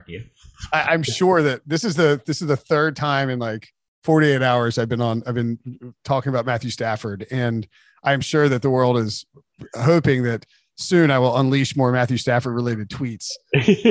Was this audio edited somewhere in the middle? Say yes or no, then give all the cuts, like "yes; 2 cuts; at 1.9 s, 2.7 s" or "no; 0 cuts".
no; 0 cuts